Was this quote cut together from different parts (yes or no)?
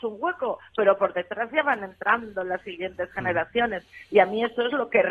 no